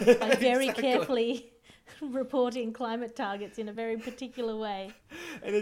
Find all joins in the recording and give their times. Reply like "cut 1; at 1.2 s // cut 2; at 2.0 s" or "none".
none